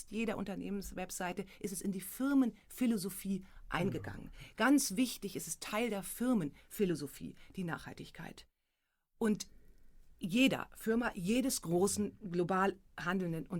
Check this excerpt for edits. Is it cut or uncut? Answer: uncut